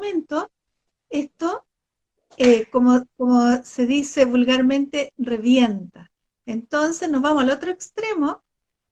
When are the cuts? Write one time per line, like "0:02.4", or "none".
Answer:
none